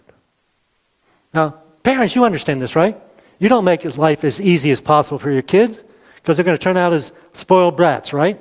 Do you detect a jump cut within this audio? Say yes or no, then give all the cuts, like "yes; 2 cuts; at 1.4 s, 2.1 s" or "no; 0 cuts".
no; 0 cuts